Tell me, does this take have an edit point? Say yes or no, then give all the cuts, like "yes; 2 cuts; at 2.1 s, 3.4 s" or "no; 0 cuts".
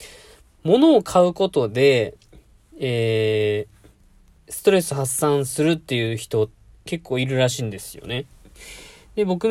no; 0 cuts